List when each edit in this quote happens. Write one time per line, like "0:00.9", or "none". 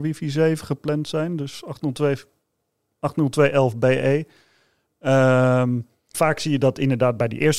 0:06.1